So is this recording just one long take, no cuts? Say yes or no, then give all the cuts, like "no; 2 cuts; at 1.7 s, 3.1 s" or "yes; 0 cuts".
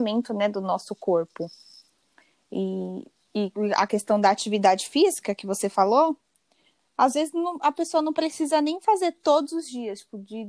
yes; 0 cuts